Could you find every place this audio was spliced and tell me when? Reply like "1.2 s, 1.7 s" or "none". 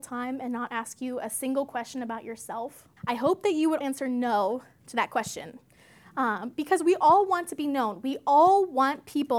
3.0 s, 3.8 s